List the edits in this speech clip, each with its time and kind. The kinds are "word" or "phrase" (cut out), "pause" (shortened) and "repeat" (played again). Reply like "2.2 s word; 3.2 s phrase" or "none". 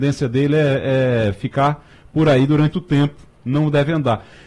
2.7 s word